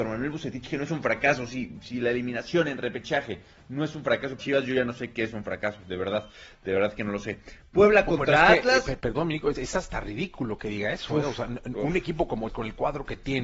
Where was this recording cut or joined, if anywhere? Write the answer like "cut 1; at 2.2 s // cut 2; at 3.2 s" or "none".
cut 1; at 4.4 s // cut 2; at 9.0 s // cut 3; at 9.5 s // cut 4; at 12.5 s